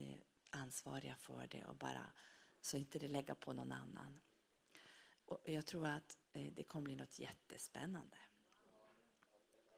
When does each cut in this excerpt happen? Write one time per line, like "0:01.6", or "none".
0:06.2